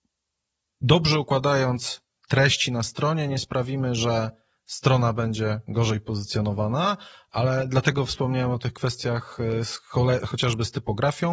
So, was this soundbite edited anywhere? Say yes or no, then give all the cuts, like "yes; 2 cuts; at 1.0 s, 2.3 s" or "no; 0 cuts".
no; 0 cuts